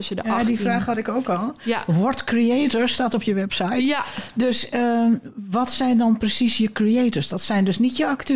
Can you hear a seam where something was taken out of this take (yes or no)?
no